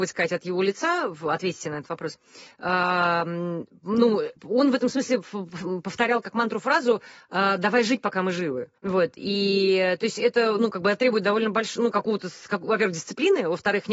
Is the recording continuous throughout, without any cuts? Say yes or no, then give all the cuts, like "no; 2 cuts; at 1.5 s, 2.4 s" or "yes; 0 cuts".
no; 2 cuts; at 4.4 s, 8.8 s